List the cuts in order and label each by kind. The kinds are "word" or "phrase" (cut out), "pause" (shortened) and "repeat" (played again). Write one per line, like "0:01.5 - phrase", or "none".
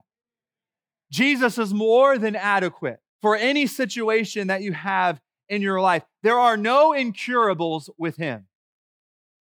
0:03.1 - pause